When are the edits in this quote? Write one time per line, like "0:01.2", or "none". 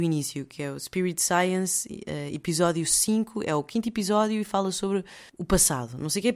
0:05.3